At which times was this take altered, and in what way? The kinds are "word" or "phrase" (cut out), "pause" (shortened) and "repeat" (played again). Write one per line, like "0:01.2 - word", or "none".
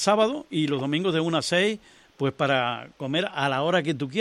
none